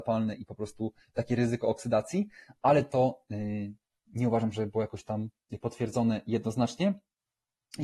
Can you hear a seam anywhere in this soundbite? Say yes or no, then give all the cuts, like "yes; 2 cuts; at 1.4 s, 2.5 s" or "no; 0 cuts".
no; 0 cuts